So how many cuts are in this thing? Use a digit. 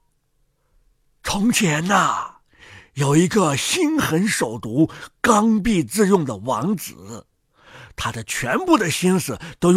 0